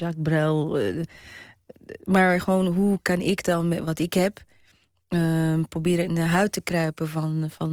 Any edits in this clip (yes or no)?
no